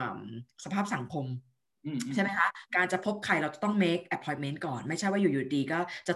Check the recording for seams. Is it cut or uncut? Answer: uncut